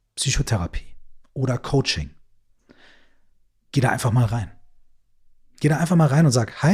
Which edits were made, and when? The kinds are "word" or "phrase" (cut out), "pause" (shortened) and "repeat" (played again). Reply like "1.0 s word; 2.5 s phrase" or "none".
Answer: none